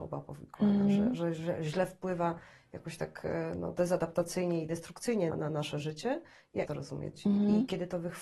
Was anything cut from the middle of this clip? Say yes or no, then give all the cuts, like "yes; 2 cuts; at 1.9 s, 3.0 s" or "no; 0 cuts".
yes; 2 cuts; at 5.3 s, 6.6 s